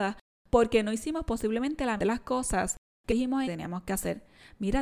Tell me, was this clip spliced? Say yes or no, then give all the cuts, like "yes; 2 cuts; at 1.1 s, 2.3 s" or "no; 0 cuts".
yes; 3 cuts; at 2.0 s, 3.1 s, 3.4 s